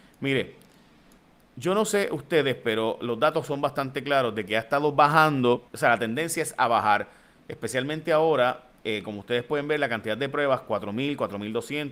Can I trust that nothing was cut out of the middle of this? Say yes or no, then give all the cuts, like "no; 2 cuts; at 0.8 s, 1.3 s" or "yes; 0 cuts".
no; 1 cut; at 5.7 s